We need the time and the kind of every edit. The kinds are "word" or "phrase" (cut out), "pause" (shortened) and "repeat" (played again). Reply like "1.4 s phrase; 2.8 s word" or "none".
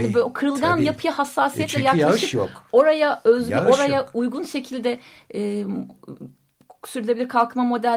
none